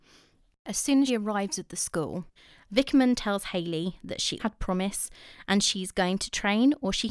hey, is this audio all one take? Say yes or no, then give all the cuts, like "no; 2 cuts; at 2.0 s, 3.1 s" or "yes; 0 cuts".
no; 3 cuts; at 1.1 s, 2.4 s, 4.4 s